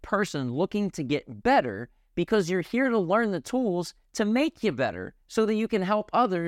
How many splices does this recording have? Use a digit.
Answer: 1